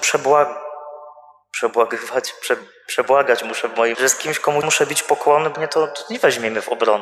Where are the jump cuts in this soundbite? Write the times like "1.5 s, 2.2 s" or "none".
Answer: 3.9 s, 4.6 s, 5.5 s